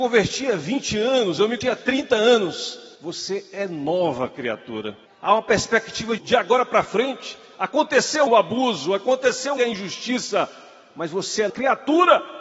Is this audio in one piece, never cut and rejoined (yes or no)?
no